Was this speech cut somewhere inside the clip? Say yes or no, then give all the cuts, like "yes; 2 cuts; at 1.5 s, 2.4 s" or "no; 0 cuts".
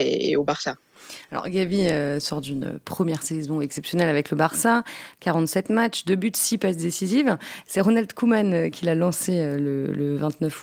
no; 0 cuts